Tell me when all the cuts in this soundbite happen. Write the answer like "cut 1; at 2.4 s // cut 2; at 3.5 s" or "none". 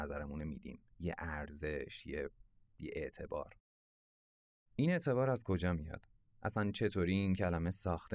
cut 1; at 0.9 s